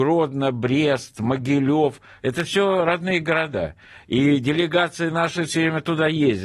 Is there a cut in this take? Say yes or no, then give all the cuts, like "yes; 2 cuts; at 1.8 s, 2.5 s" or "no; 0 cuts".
no; 0 cuts